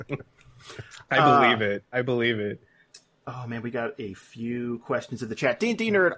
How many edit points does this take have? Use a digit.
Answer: 0